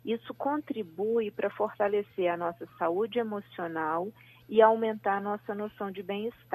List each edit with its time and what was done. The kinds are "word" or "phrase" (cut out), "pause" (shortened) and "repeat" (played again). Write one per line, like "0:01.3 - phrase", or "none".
none